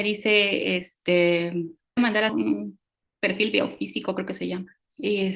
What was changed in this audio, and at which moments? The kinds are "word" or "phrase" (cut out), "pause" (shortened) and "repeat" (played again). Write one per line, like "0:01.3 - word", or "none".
0:02.0 - phrase
0:02.3 - word